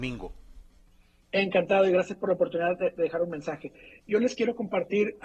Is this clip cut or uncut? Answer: uncut